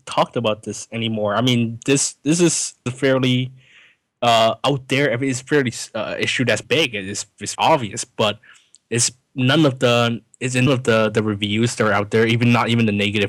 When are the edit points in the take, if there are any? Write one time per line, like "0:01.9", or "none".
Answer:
0:02.9
0:06.6
0:07.5
0:10.7